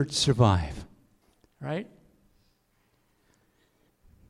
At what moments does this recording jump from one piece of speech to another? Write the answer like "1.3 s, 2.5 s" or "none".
1.2 s